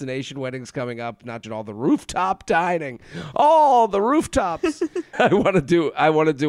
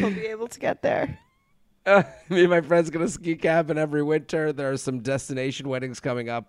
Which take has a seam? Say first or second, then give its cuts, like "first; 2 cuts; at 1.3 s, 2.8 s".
first; 2 cuts; at 1.4 s, 5.1 s